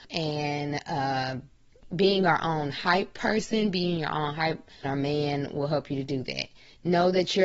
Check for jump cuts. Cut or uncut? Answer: cut